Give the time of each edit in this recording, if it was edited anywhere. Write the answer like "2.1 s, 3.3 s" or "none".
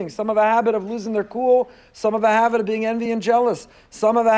none